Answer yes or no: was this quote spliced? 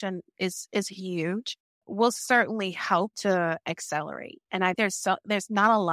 yes